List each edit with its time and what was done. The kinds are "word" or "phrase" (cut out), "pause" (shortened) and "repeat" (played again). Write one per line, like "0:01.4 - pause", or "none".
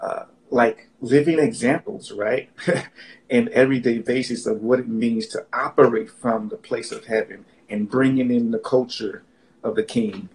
none

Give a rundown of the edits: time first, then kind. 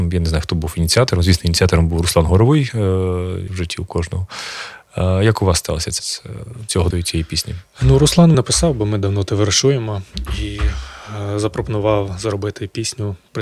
0:03.5 - phrase
0:06.0 - word
0:06.9 - word
0:08.3 - word

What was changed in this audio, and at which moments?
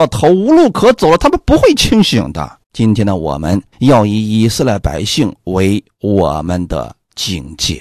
0:02.6 - pause
0:03.7 - pause

